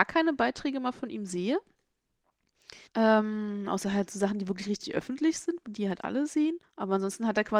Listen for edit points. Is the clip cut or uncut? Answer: cut